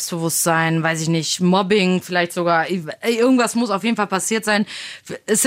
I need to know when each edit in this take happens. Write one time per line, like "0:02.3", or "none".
none